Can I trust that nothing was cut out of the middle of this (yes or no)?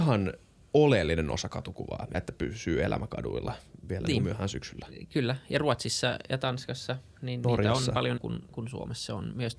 no